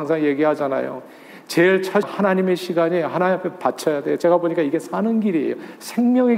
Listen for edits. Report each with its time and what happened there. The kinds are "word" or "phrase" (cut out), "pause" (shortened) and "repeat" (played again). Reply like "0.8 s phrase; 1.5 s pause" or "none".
2.0 s word